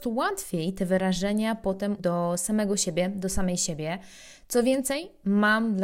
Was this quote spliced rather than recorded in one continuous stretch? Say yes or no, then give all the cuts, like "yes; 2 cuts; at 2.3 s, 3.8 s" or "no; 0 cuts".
yes; 1 cut; at 2.0 s